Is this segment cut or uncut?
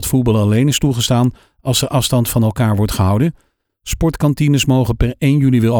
uncut